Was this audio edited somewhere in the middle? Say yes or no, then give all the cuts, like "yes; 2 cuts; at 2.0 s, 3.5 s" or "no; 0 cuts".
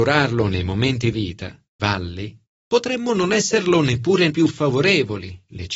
yes; 3 cuts; at 1.1 s, 1.8 s, 4.3 s